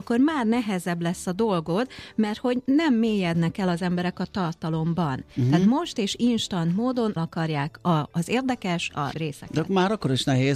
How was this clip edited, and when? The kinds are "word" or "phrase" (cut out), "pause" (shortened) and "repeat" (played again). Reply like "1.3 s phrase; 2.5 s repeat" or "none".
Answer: 7.2 s word; 9.1 s word

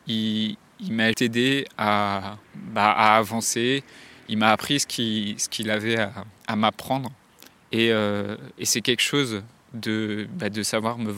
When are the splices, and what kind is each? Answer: 1.1 s word; 2.4 s pause; 6.4 s pause

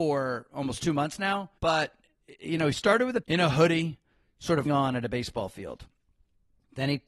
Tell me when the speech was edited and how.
1.6 s pause; 3.2 s phrase; 4.7 s word

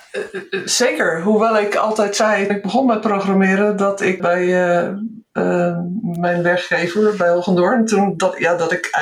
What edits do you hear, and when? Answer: 2.5 s word; 4.2 s word

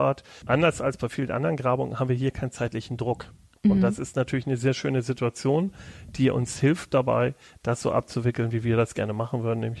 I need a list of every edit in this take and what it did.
none

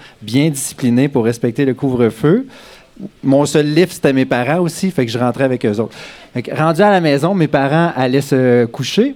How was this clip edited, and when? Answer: 3.2 s pause

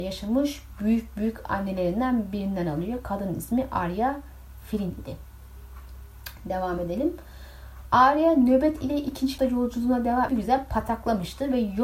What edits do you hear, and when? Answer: 9.4 s word; 10.3 s phrase

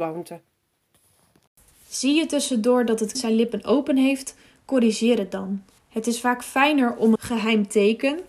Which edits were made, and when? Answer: 3.1 s word; 5.8 s pause; 7.1 s word

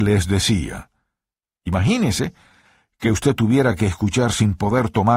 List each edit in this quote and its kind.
none

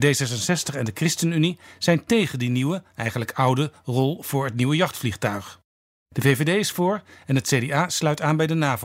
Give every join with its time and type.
none

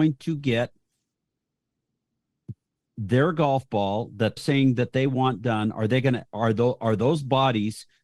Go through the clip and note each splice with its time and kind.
4.4 s word

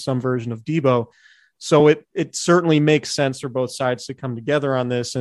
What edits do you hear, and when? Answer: none

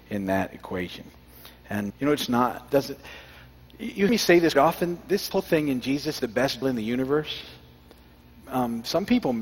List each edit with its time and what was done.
1.9 s word; 2.7 s word; 4.1 s word; 4.5 s word; 5.3 s word; 6.2 s word; 6.6 s word

